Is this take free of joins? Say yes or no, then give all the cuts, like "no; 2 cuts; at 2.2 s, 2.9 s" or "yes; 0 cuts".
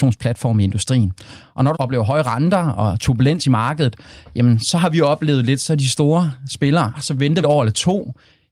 no; 3 cuts; at 1.7 s, 6.9 s, 7.4 s